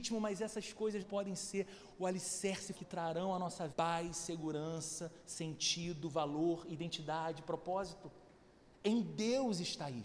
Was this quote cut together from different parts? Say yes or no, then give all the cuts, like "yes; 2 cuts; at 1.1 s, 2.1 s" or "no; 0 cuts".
yes; 3 cuts; at 1.0 s, 2.7 s, 3.7 s